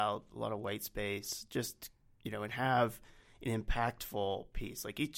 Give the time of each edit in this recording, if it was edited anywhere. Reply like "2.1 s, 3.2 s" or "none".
none